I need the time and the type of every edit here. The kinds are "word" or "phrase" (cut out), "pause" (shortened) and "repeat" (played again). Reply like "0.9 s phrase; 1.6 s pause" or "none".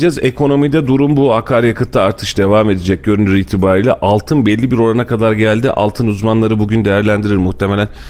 none